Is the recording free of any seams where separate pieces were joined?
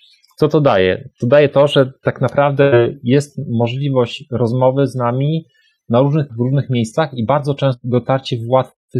no; 1 cut; at 6.3 s

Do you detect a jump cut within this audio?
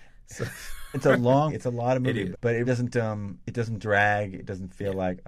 yes; 4 cuts; at 0.9 s, 1.5 s, 2.3 s, 2.6 s

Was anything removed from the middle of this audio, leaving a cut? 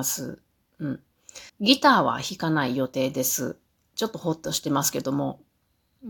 yes; 1 cut; at 1.5 s

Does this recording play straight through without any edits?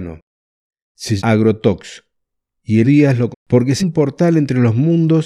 no; 4 cuts; at 1.2 s, 2.8 s, 3.3 s, 3.8 s

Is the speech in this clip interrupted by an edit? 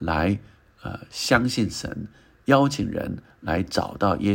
no; 0 cuts

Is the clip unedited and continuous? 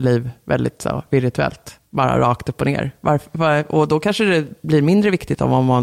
no; 1 cut; at 1.9 s

